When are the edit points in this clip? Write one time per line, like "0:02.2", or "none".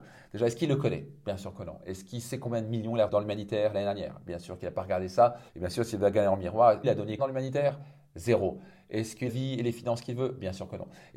0:03.1
0:05.5
0:06.8
0:07.2
0:09.3